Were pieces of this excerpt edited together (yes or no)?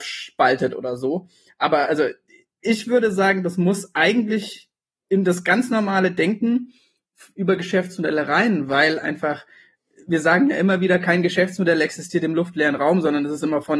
no